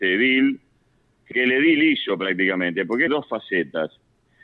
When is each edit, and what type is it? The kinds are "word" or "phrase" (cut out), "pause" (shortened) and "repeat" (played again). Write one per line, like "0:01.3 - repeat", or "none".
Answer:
0:01.3 - word
0:03.1 - phrase